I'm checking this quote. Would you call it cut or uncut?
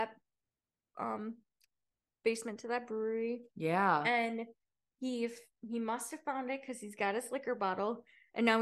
uncut